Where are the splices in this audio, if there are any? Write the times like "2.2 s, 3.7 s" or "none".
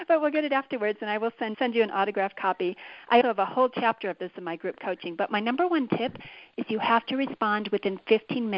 1.5 s, 3.2 s